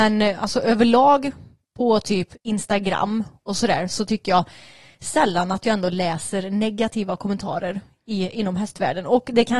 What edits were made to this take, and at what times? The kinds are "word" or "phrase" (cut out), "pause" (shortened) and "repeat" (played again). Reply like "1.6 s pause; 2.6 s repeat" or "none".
2.4 s pause